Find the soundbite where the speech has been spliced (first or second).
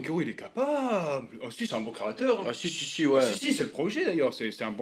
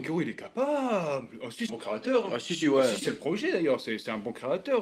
second